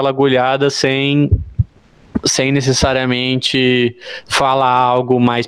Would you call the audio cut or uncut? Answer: uncut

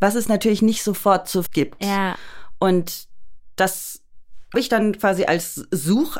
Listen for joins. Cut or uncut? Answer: cut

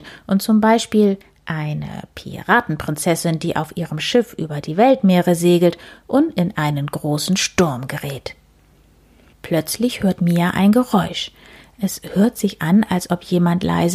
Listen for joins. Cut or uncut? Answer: uncut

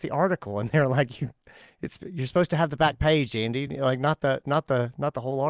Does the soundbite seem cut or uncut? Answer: uncut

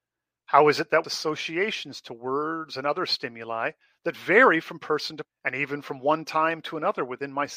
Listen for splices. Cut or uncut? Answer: cut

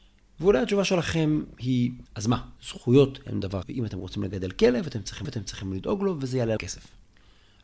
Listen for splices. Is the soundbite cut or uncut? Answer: cut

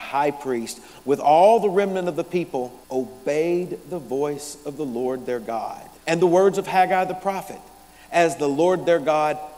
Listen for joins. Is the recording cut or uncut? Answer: cut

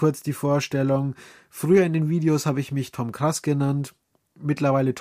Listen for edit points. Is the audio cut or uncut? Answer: uncut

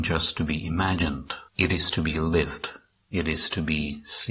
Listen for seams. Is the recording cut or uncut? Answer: cut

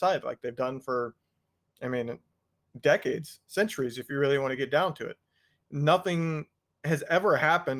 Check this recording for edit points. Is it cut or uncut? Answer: uncut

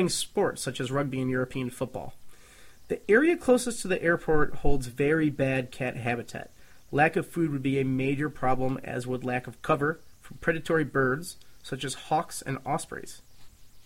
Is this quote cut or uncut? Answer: uncut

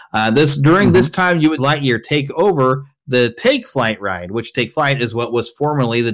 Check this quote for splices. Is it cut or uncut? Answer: cut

